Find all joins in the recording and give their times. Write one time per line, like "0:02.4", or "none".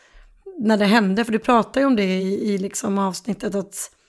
none

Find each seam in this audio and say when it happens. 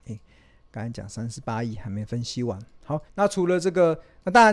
0:03.1

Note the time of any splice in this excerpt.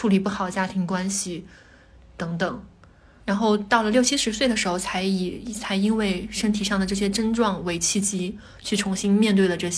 none

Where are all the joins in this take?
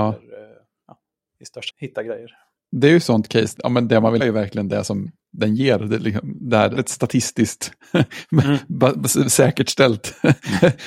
0:01.7
0:03.6
0:04.2
0:06.8

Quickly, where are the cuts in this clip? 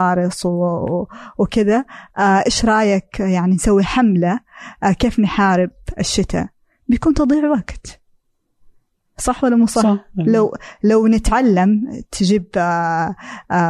none

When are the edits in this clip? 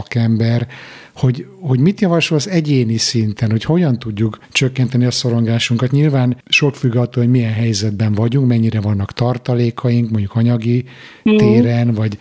0:04.4
0:06.4

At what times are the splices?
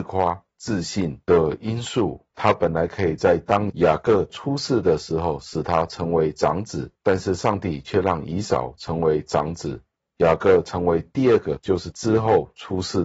0:02.3
0:07.0
0:10.0

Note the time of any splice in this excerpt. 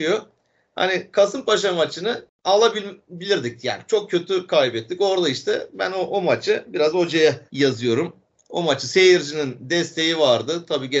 0:07.5

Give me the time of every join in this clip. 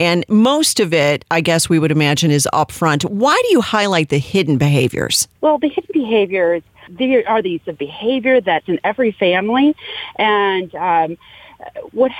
0:05.3
0:06.9
0:07.6
0:08.6

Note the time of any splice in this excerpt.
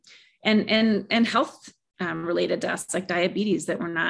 none

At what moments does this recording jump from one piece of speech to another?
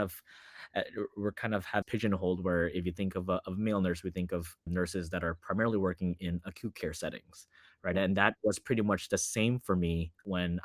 0:01.8
0:04.7

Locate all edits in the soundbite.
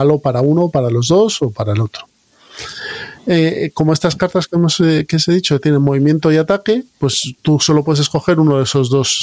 none

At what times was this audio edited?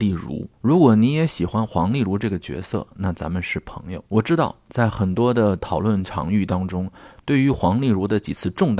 0:04.1

